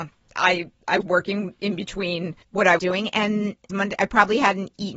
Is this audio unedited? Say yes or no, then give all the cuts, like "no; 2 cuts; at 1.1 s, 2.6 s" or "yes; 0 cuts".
no; 4 cuts; at 1.0 s, 2.4 s, 2.8 s, 3.7 s